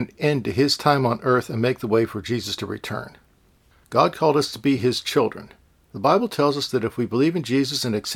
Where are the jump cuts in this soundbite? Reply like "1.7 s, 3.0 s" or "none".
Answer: none